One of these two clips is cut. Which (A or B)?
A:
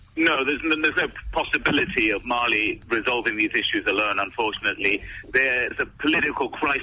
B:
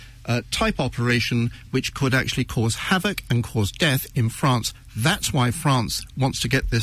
A